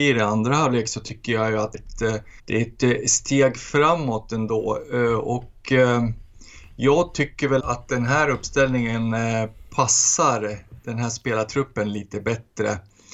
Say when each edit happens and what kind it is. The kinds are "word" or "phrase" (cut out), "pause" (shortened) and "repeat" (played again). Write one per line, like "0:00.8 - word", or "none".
0:01.7 - phrase
0:02.4 - pause
0:07.6 - word
0:10.8 - pause